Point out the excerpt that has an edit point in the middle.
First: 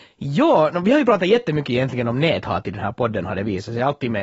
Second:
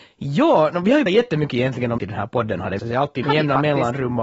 second; 4 cuts; at 1.1 s, 2.0 s, 2.8 s, 3.2 s

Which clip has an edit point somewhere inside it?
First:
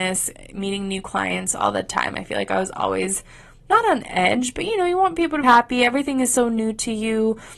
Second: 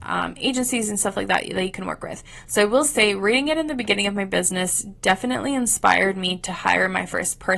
first; 1 cut; at 5.4 s

